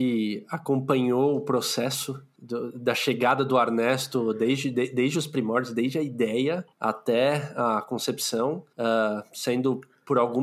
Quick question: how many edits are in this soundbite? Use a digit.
2